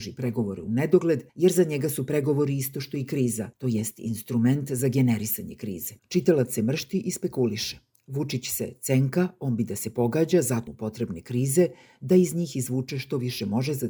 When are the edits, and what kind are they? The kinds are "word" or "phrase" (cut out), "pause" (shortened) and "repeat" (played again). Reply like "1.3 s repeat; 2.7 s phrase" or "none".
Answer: 1.3 s pause; 3.5 s pause; 6.0 s pause; 10.7 s word

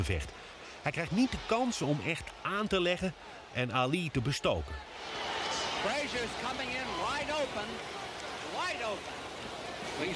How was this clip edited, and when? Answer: none

